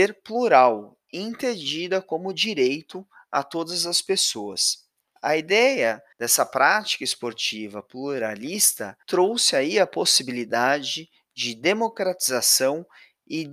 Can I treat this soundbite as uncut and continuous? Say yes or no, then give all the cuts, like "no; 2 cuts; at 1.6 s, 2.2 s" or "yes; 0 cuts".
no; 3 cuts; at 5.0 s, 6.1 s, 9.0 s